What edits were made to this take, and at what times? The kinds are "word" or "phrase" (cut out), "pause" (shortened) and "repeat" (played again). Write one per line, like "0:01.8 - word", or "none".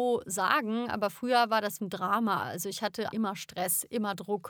0:01.8 - word
0:03.1 - word